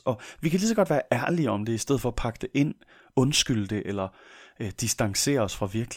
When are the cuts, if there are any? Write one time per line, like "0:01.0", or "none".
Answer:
none